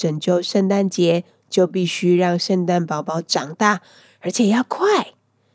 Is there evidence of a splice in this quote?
no; 0 cuts

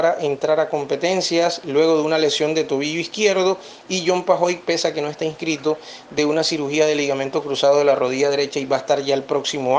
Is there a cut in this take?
no; 0 cuts

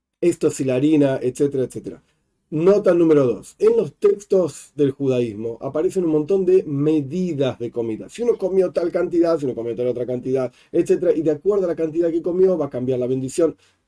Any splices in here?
no; 0 cuts

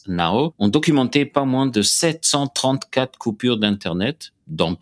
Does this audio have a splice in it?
no; 0 cuts

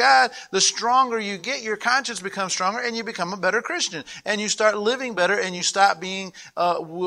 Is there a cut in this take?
no; 0 cuts

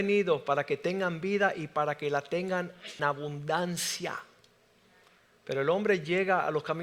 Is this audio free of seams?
no; 1 cut; at 3.0 s

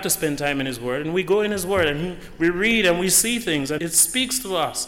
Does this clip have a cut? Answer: yes; 1 cut; at 3.8 s

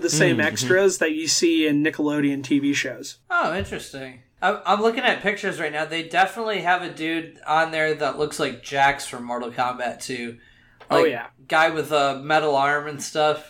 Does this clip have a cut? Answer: yes; 2 cuts; at 3.2 s, 4.3 s

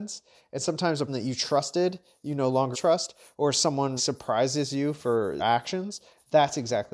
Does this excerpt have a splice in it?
yes; 4 cuts; at 1.1 s, 2.7 s, 4.0 s, 5.4 s

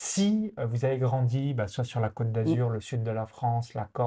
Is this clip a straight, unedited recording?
yes; 0 cuts

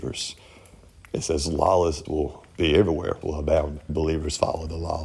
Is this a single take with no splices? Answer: no; 4 cuts; at 2.0 s, 2.5 s, 3.2 s, 3.9 s

